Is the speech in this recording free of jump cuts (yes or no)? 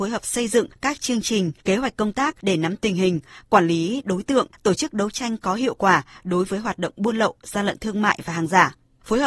yes